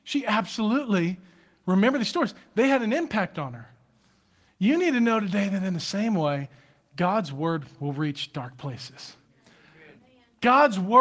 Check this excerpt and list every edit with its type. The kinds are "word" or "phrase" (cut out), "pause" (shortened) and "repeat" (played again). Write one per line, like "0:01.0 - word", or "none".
none